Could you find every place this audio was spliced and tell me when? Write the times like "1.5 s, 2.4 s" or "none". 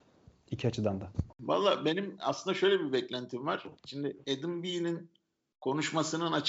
1.3 s, 3.8 s